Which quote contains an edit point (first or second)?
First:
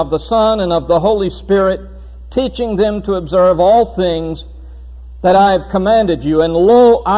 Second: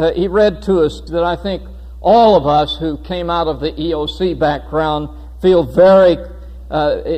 second